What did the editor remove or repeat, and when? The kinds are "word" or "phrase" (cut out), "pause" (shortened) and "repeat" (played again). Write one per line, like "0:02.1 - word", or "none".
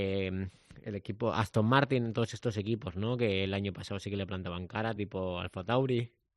none